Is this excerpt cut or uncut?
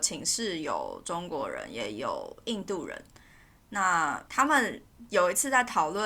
cut